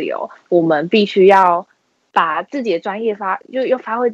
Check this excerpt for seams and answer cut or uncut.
uncut